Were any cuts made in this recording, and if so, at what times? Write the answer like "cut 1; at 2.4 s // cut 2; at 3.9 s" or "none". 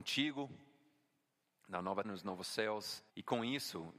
cut 1; at 2.0 s // cut 2; at 3.1 s